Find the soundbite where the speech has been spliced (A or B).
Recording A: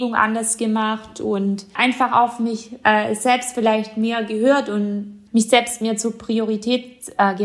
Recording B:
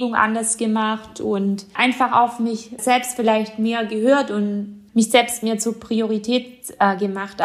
B